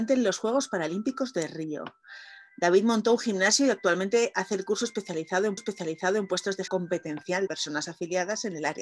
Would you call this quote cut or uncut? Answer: cut